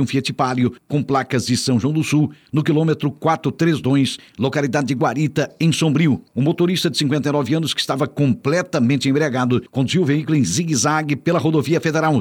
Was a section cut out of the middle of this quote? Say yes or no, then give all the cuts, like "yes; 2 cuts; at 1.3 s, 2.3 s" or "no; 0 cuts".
yes; 2 cuts; at 6.3 s, 9.7 s